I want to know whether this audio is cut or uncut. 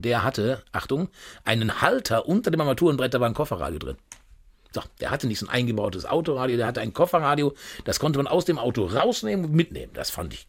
uncut